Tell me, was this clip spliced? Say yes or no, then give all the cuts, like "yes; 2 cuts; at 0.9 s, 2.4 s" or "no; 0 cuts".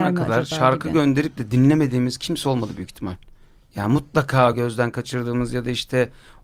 no; 0 cuts